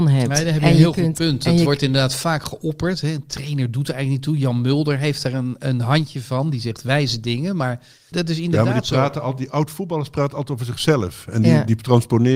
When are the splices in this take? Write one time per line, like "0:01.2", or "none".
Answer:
0:08.1